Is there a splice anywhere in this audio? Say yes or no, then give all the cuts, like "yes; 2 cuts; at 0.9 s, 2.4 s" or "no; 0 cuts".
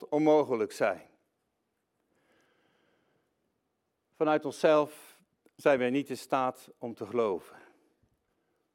no; 0 cuts